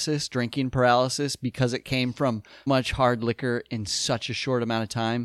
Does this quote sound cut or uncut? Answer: cut